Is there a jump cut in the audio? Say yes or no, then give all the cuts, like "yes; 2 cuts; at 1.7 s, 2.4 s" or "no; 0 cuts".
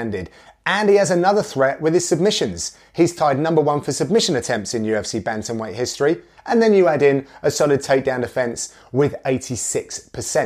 no; 0 cuts